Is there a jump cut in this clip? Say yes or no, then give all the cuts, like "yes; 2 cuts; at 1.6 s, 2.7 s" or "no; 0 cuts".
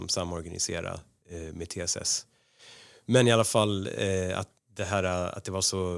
yes; 1 cut; at 4.6 s